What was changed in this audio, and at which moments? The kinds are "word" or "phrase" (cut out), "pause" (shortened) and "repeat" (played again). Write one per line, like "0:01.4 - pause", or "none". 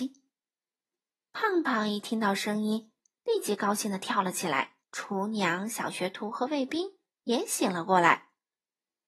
0:04.8 - pause